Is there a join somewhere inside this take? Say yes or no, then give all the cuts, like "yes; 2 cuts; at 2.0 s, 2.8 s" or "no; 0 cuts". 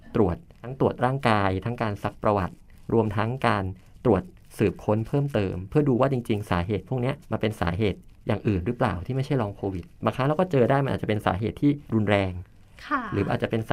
yes; 2 cuts; at 7.2 s, 11.8 s